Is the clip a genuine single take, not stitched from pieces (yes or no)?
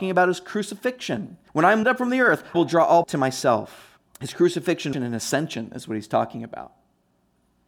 no